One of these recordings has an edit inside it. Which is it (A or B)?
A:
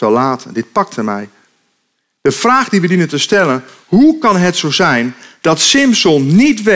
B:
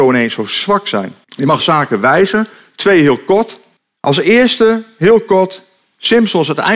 B